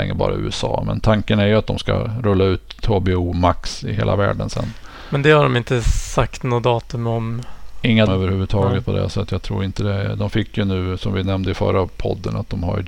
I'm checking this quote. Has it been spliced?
yes; 1 cut; at 8.1 s

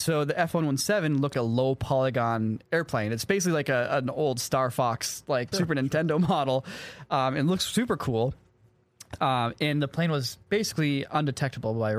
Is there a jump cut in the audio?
yes; 2 cuts; at 1.3 s, 5.5 s

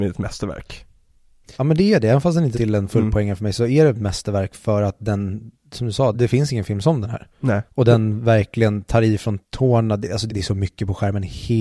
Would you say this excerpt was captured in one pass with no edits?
no; 6 cuts; at 1.5 s, 2.5 s, 6.1 s, 7.7 s, 9.4 s, 10.3 s

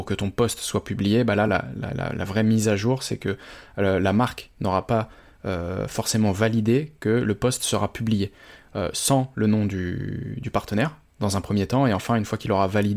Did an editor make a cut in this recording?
no; 0 cuts

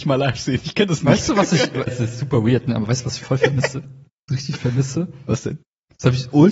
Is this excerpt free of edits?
no; 2 cuts; at 1.9 s, 4.3 s

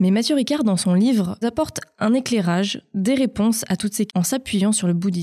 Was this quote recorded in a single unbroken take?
no; 2 cuts; at 1.4 s, 4.1 s

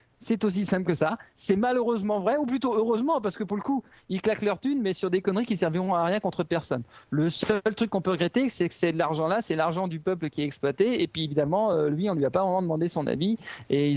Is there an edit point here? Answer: no; 0 cuts

